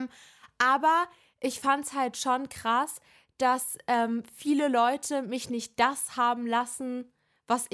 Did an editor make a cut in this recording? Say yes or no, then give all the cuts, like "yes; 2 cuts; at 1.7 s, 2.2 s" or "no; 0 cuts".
no; 0 cuts